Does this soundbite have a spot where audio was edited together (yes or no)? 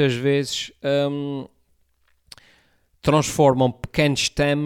no